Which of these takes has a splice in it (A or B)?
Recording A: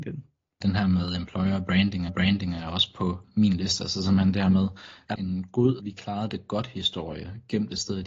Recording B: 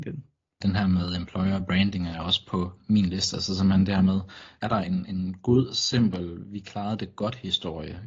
A